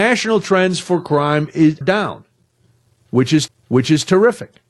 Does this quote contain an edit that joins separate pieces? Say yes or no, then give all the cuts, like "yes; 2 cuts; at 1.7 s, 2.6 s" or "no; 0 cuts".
yes; 2 cuts; at 1.8 s, 3.5 s